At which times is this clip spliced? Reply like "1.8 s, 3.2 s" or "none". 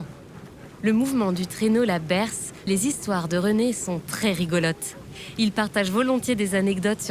2.7 s